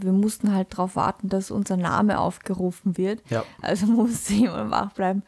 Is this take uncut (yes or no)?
yes